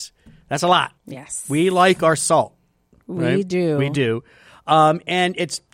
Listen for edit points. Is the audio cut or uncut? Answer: cut